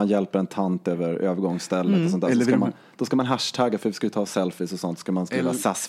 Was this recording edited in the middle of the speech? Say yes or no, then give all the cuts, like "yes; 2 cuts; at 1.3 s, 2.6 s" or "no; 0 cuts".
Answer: no; 0 cuts